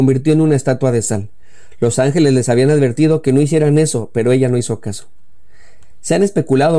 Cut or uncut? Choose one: uncut